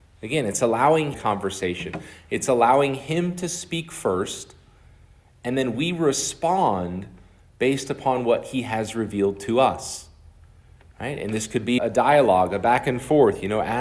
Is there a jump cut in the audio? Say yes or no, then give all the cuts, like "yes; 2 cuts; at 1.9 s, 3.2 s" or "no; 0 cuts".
yes; 2 cuts; at 1.1 s, 11.8 s